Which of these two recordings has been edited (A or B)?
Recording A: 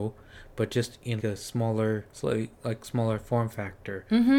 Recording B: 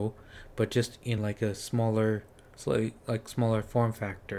A